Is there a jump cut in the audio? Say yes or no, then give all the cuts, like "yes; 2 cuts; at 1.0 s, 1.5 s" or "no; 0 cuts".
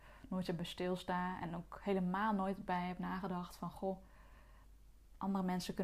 no; 0 cuts